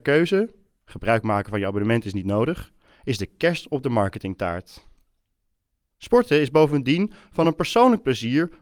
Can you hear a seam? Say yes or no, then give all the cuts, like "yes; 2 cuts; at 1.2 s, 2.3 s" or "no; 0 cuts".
no; 0 cuts